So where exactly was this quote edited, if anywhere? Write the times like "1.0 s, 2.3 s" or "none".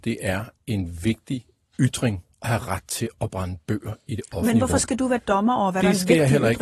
2.3 s

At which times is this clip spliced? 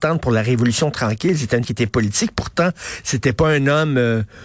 1.6 s

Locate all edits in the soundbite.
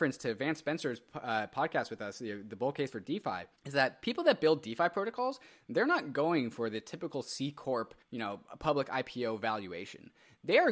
3.6 s, 8.0 s

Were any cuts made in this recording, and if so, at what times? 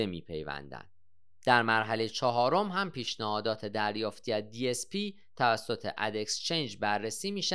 none

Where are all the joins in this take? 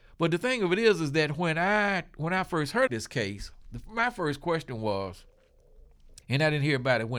2.9 s, 6.2 s

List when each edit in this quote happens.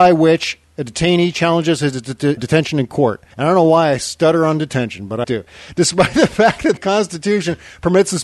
2.4 s, 3.3 s, 5.2 s, 6.8 s

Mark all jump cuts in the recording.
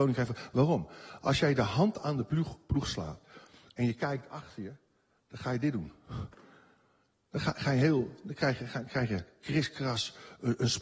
none

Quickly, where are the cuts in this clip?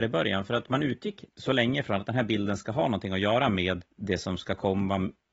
1.3 s, 3.9 s

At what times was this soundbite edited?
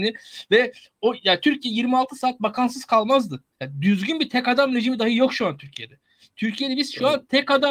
3.5 s

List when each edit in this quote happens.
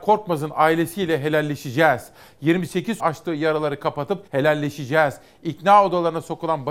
3.0 s, 4.3 s

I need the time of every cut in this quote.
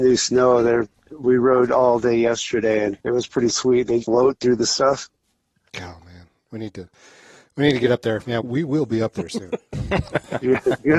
3.0 s, 4.0 s, 8.4 s

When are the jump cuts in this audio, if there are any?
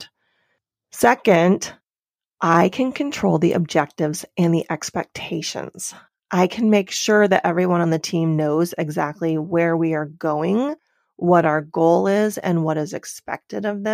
none

